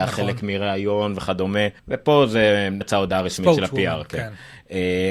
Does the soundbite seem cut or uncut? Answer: cut